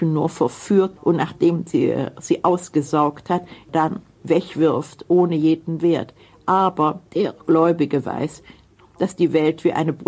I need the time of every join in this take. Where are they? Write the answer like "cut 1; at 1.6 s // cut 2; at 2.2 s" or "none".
cut 1; at 1.0 s // cut 2; at 7.1 s